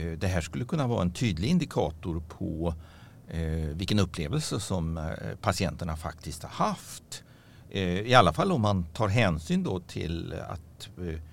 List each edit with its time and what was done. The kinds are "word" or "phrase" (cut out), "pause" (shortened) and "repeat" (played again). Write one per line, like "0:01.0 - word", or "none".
none